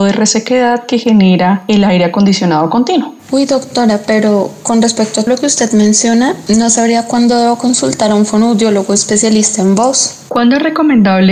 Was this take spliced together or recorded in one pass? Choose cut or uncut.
cut